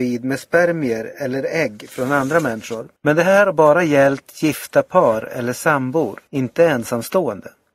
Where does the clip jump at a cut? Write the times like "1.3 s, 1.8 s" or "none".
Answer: 3.0 s, 6.3 s